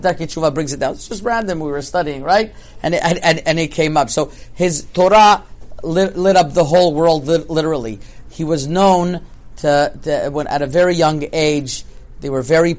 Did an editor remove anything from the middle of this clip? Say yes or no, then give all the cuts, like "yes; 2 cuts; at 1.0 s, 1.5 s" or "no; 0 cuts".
no; 0 cuts